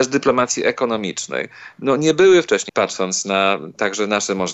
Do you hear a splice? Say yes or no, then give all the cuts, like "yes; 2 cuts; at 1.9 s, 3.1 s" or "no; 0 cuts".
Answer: yes; 1 cut; at 2.7 s